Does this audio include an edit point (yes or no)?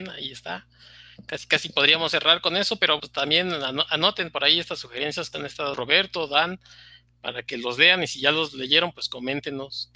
yes